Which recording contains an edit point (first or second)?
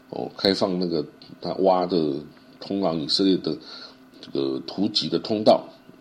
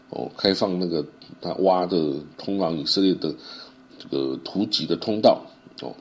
second